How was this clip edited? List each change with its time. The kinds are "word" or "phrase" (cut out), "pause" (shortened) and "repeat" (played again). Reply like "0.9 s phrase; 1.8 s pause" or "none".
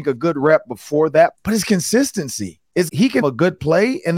1.3 s word; 2.9 s word; 3.2 s word